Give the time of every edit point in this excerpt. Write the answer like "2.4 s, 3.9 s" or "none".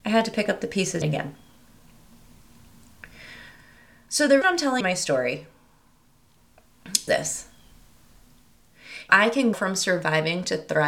1.0 s, 4.4 s, 4.8 s, 7.1 s, 9.1 s, 9.5 s